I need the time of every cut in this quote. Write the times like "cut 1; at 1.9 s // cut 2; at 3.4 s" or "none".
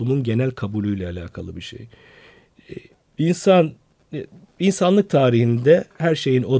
cut 1; at 2.9 s

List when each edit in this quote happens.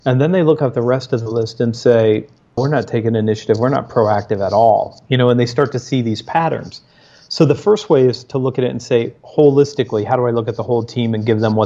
none

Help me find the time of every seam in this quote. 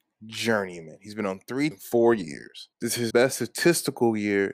cut 1; at 1.7 s // cut 2; at 2.7 s // cut 3; at 3.1 s

